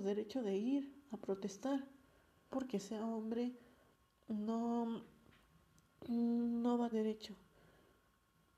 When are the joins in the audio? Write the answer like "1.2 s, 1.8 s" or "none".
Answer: 2.5 s, 6.9 s